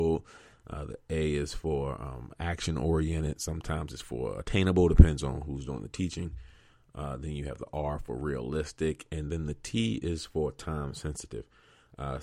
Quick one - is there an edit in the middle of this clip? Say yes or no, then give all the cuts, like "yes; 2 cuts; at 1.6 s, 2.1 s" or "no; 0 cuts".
no; 0 cuts